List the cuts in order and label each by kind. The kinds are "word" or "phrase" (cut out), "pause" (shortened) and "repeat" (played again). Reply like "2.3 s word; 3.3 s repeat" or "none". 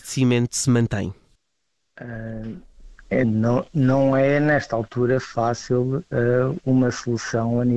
1.4 s pause; 3.2 s word